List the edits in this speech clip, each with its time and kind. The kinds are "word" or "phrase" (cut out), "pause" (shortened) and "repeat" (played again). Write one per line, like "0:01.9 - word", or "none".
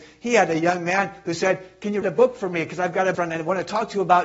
0:02.0 - word
0:03.1 - word